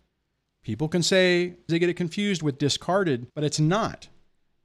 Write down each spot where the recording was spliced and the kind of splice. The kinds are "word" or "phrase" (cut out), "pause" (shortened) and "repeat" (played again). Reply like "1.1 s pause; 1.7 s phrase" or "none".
1.7 s word; 3.3 s pause